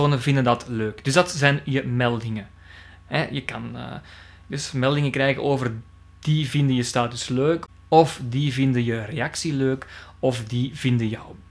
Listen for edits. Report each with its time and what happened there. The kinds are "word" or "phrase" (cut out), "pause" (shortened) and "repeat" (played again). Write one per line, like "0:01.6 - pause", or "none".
none